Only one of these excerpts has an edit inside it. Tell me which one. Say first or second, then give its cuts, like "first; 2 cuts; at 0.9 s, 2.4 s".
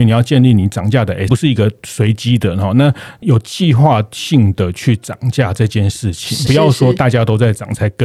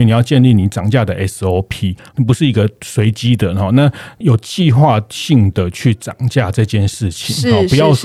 first; 2 cuts; at 1.3 s, 6.5 s